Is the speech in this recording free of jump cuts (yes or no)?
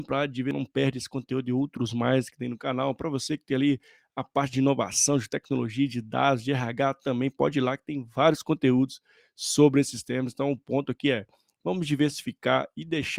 yes